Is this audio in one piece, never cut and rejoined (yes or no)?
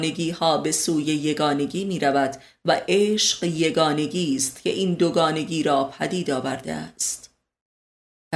yes